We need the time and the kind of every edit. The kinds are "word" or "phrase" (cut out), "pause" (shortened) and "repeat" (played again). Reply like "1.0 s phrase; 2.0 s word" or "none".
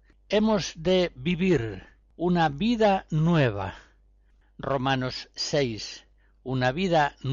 none